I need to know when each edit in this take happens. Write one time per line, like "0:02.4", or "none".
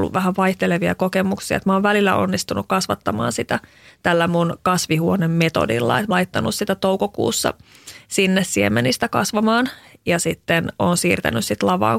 0:06.1